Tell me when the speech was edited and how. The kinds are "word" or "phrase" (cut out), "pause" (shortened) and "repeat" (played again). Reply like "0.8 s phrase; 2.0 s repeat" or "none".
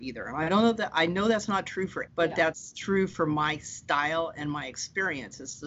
2.1 s word